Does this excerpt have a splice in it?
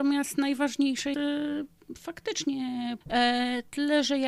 yes; 2 cuts; at 1.1 s, 3.0 s

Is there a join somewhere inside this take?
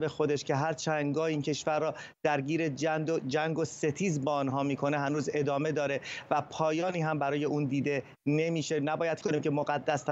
yes; 1 cut; at 9.2 s

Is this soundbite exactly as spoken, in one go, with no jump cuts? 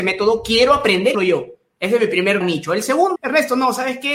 no; 3 cuts; at 1.1 s, 2.4 s, 3.2 s

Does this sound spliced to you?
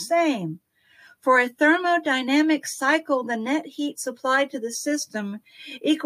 no; 0 cuts

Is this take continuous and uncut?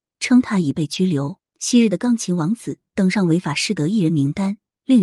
no; 1 cut; at 1.5 s

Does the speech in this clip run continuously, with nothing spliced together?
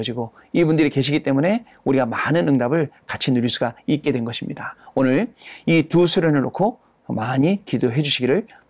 yes; 0 cuts

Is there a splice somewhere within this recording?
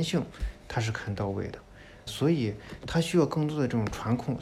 yes; 1 cut; at 2.1 s

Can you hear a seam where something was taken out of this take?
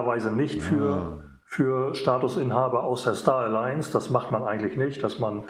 no; 0 cuts

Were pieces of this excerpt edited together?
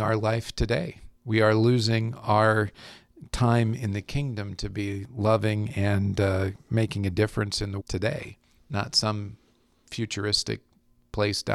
yes; 3 cuts; at 1.2 s, 7.8 s, 8.6 s

